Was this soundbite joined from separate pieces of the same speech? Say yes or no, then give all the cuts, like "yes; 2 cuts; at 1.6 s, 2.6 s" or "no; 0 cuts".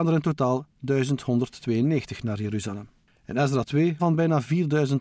yes; 2 cuts; at 3.0 s, 4.0 s